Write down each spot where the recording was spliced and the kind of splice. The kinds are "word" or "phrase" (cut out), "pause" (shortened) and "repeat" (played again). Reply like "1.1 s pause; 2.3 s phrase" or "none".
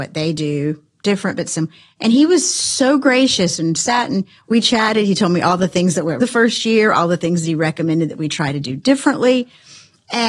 6.2 s word